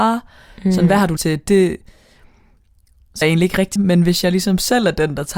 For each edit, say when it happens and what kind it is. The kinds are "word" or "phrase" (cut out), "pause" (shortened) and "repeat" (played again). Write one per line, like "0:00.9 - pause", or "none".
0:01.2 - word
0:03.2 - word
0:03.8 - word